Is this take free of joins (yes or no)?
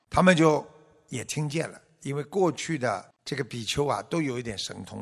no